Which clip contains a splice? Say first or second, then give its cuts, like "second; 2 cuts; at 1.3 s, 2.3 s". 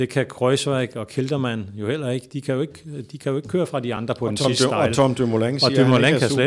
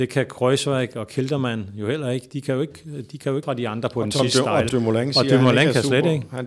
second; 2 cuts; at 3.4 s, 4.7 s